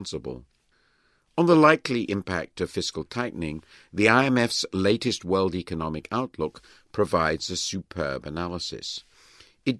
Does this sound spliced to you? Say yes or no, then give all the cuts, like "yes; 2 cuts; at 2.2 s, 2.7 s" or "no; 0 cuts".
no; 0 cuts